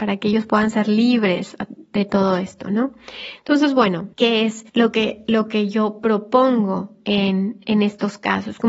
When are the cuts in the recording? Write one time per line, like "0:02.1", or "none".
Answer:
0:04.1
0:04.7